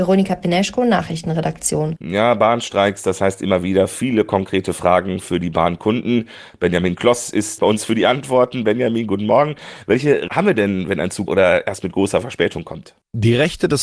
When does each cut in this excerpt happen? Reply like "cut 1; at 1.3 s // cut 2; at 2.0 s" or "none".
cut 1; at 7.6 s // cut 2; at 10.3 s // cut 3; at 11.3 s